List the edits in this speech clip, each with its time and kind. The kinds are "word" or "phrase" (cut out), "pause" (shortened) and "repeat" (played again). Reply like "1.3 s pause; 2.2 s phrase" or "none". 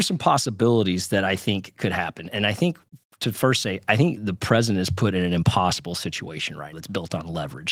4.2 s word; 6.7 s word